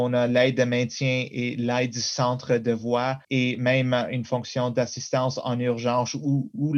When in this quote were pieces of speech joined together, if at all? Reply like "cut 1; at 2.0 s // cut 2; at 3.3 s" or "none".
cut 1; at 3.2 s